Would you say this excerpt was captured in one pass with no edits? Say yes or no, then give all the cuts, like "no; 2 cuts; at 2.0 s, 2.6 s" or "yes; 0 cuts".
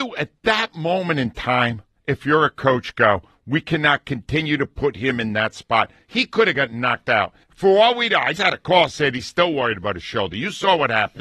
no; 2 cuts; at 7.4 s, 8.3 s